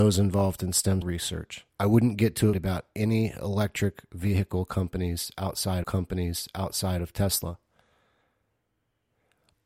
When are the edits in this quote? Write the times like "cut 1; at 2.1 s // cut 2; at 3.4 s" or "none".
cut 1; at 1.0 s // cut 2; at 1.7 s // cut 3; at 2.5 s // cut 4; at 5.8 s